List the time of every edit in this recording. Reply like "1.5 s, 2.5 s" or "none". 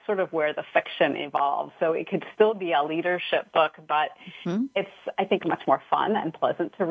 none